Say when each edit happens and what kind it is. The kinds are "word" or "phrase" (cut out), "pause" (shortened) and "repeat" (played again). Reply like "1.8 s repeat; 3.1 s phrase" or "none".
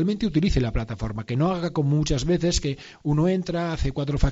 none